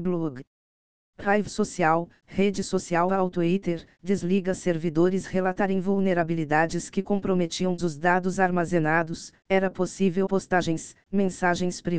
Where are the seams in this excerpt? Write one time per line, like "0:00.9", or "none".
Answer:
0:03.1
0:05.2
0:07.8
0:10.3

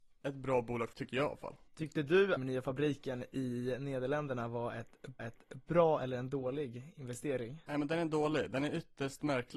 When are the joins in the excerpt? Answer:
0:00.9
0:01.7
0:02.4
0:05.2

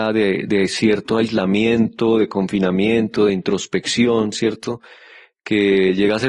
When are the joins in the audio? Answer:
none

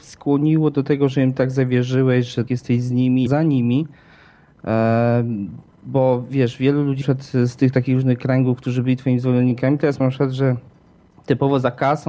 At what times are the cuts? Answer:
0:02.5
0:03.3
0:07.0
0:10.0

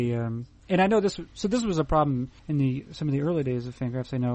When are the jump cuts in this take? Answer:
0:02.4

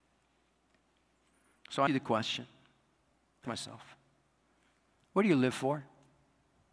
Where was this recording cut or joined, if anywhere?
0:01.9
0:03.4

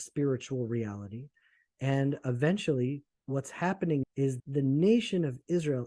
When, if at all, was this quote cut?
0:03.1
0:04.0
0:04.4

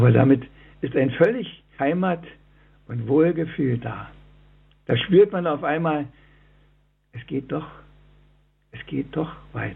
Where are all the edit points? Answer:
0:01.8

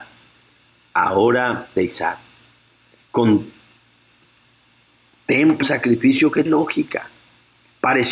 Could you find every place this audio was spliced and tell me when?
0:01.8
0:05.6
0:06.5

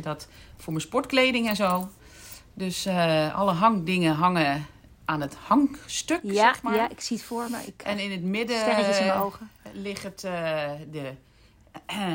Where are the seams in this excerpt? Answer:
none

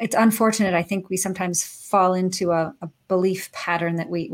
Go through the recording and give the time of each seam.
none

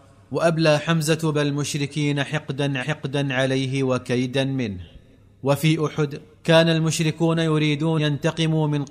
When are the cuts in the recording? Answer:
0:01.3
0:02.8
0:05.1
0:06.3
0:08.0

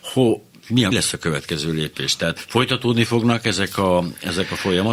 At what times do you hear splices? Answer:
0:00.9
0:02.4

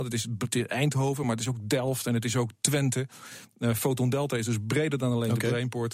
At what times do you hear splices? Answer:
none

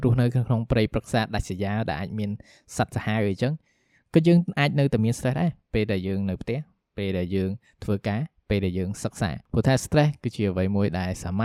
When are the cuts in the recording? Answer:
none

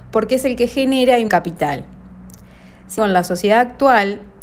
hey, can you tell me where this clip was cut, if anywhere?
0:01.3
0:03.0

